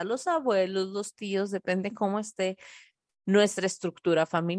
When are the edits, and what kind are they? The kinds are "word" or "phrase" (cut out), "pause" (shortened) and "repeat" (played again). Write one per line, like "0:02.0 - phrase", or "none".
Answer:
none